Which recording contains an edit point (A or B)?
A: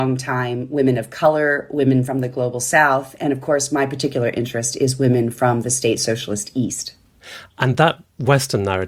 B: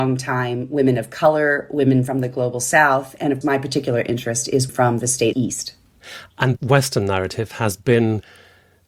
B